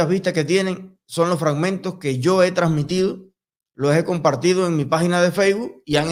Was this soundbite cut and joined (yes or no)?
no